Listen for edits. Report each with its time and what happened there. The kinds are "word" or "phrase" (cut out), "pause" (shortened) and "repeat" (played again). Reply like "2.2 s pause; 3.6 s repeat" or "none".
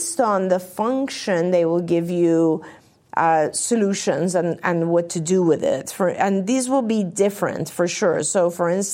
none